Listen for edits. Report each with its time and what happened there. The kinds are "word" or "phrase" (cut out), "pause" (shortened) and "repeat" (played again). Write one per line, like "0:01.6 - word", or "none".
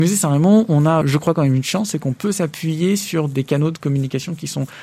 0:01.0 - word